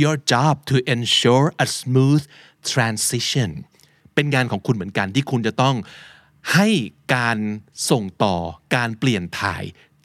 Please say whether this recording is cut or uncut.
uncut